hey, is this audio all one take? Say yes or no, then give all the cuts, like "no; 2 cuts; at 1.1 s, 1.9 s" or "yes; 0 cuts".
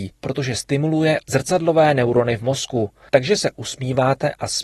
yes; 0 cuts